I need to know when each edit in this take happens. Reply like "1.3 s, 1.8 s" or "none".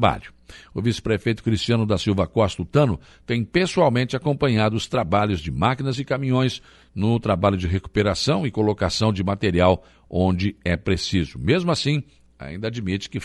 none